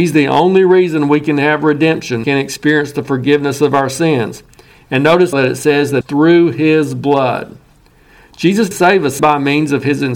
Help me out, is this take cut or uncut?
cut